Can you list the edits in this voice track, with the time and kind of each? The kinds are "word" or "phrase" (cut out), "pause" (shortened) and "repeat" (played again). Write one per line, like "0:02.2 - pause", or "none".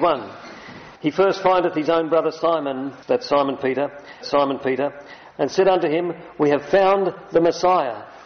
0:01.0 - pause
0:03.0 - pause
0:04.2 - repeat